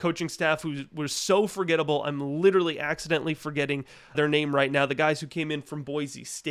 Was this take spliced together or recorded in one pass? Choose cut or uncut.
cut